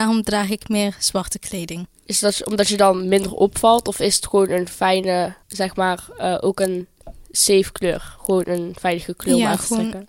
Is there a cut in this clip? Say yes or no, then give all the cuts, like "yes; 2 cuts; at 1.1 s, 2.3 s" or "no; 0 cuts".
yes; 1 cut; at 5.4 s